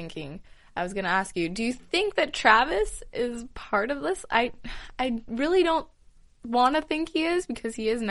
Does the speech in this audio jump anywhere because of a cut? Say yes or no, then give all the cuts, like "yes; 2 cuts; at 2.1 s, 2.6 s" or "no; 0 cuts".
no; 0 cuts